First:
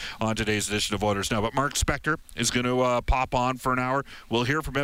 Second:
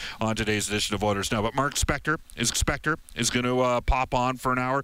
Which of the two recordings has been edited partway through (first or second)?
second